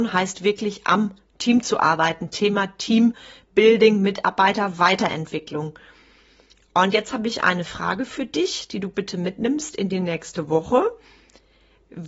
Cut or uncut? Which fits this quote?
uncut